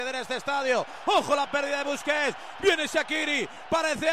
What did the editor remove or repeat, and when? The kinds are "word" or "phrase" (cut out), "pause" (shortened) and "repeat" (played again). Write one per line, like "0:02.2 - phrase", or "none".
none